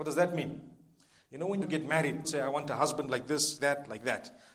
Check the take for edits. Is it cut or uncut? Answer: cut